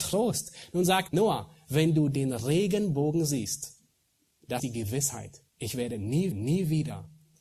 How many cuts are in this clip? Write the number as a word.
four